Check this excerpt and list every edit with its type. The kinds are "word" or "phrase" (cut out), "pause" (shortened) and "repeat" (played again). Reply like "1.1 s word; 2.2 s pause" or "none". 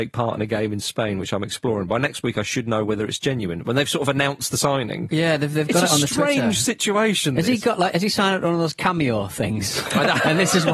none